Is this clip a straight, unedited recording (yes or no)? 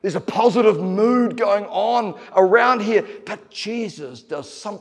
yes